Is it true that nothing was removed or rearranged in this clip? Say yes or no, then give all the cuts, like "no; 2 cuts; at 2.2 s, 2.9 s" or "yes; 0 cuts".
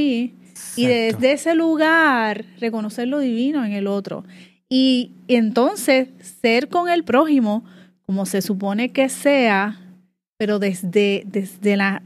yes; 0 cuts